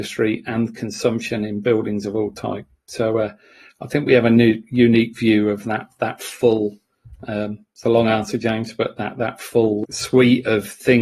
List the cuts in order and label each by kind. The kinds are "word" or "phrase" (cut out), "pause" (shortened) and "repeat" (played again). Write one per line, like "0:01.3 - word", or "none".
none